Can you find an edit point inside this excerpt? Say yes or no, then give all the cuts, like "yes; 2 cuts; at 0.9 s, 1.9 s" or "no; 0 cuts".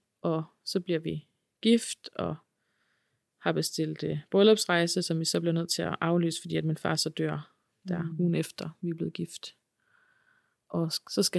no; 0 cuts